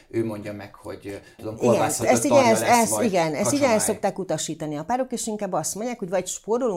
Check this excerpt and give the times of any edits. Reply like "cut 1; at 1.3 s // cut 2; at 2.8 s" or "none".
cut 1; at 1.4 s // cut 2; at 2.0 s